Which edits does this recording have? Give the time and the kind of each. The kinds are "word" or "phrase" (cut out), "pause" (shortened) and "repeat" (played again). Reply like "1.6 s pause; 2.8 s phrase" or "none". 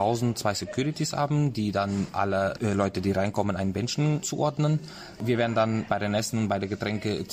none